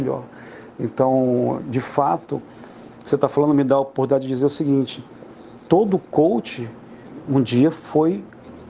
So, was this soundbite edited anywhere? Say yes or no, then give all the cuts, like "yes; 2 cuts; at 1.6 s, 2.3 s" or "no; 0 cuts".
no; 0 cuts